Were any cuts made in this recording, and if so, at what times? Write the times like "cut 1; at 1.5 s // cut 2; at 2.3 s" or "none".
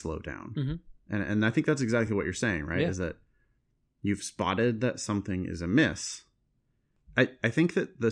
none

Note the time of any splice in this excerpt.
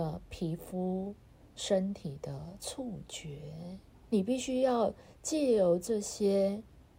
cut 1; at 4.1 s

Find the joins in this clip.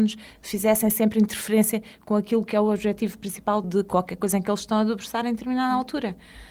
none

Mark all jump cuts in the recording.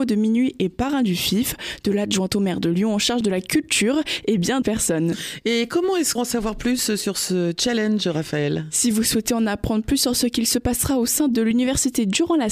cut 1; at 4.6 s // cut 2; at 6.2 s

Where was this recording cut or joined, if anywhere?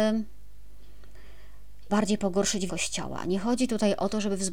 cut 1; at 1.9 s // cut 2; at 2.7 s

